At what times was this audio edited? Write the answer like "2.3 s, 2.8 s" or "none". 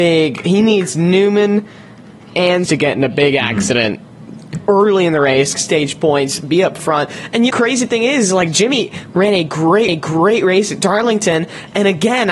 2.7 s, 5.6 s, 7.5 s, 9.9 s